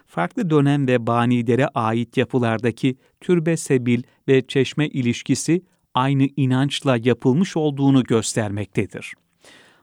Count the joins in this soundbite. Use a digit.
0